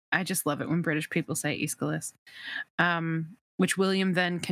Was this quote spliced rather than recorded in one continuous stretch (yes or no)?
yes